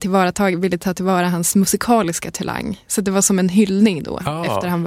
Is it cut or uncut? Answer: uncut